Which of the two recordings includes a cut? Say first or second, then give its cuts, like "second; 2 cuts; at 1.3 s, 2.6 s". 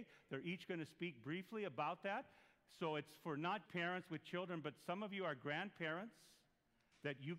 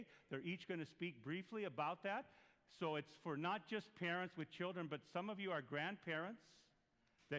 first; 1 cut; at 3.6 s